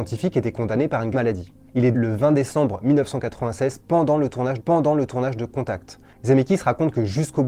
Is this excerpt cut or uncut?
cut